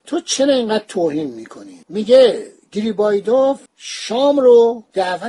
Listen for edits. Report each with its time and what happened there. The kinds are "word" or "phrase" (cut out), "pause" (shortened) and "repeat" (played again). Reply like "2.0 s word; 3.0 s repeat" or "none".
1.8 s pause; 3.7 s pause